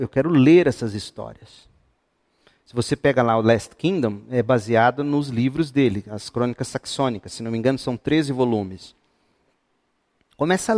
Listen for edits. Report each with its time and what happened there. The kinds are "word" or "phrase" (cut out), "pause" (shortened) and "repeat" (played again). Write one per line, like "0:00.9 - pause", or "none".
none